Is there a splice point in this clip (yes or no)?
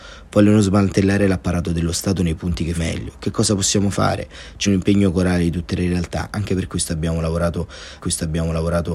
yes